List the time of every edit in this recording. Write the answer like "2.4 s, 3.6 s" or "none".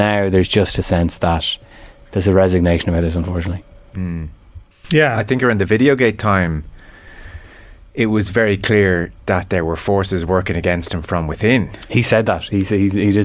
4.7 s